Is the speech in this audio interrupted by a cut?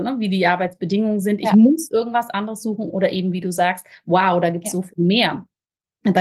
no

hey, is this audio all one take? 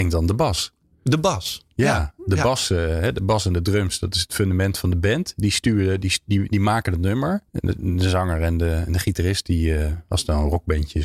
no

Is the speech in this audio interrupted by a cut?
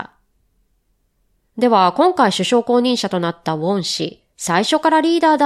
yes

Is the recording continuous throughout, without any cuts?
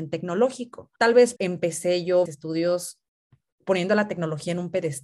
no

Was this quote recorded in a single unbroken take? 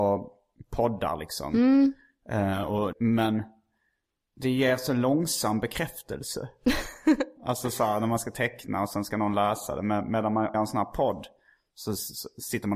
no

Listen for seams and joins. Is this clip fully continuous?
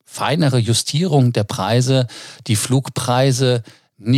yes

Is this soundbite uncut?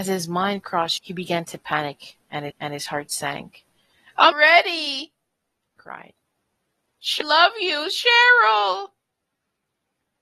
no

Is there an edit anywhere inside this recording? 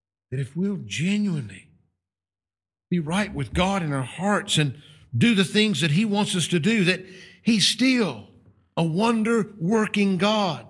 no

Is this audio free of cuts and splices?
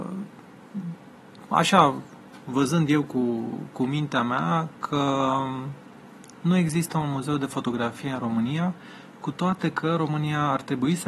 yes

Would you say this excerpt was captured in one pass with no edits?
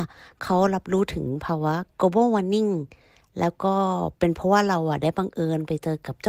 yes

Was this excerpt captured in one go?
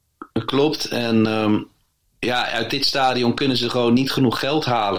yes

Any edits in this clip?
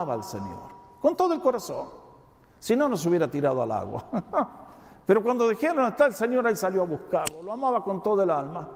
no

